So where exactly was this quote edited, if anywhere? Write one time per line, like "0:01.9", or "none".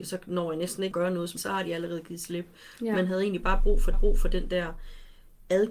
0:00.9
0:01.4
0:03.9